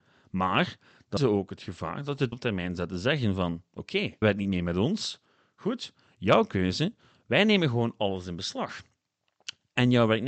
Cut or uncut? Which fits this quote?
cut